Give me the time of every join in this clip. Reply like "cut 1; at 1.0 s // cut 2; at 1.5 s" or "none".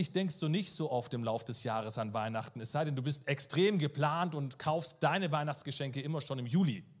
none